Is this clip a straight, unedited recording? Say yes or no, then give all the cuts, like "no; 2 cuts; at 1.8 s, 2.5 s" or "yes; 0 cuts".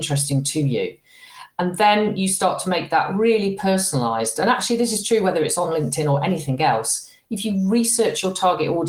yes; 0 cuts